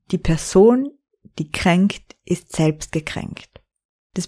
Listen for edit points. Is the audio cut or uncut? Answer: uncut